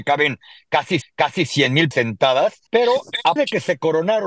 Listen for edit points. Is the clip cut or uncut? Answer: cut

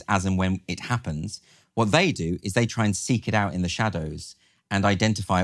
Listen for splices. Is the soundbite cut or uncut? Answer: uncut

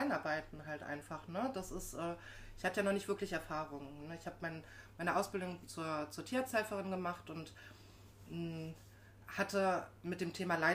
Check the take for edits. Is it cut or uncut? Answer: uncut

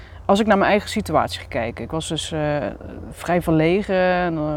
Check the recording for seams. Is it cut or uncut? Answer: uncut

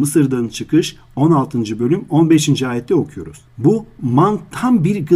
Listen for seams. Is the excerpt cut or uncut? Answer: cut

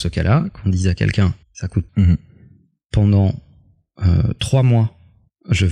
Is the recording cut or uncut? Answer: cut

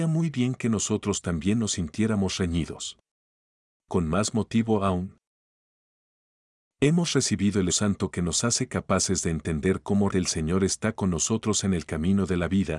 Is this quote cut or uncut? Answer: cut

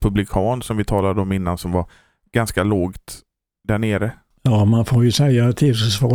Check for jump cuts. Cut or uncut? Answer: uncut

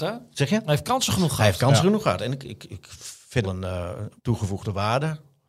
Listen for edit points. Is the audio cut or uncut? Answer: cut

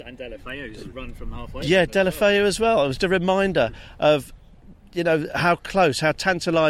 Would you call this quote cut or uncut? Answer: cut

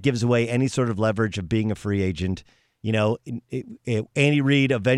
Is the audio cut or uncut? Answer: uncut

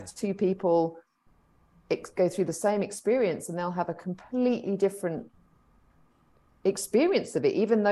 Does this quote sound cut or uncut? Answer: uncut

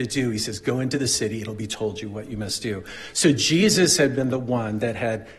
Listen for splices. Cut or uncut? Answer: uncut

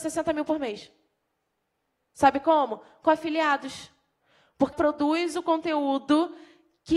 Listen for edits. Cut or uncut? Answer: cut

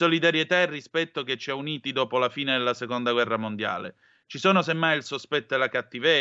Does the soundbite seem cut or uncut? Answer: uncut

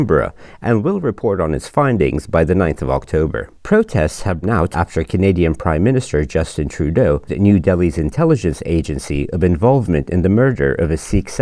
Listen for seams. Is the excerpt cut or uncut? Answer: cut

